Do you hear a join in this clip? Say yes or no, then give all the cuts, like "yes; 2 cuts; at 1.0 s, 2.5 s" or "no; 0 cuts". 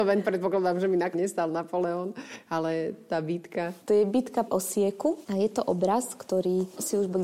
yes; 2 cuts; at 1.1 s, 4.5 s